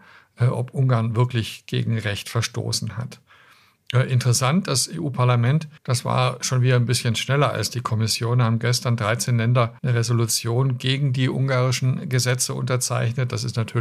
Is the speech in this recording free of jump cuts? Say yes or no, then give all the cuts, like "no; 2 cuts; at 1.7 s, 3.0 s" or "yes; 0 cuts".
no; 2 cuts; at 5.8 s, 9.8 s